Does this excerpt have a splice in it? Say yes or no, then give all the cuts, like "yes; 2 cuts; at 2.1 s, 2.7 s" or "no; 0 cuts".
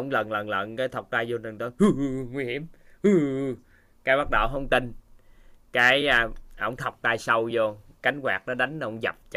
no; 0 cuts